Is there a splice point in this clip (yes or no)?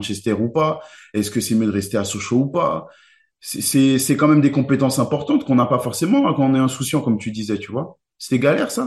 no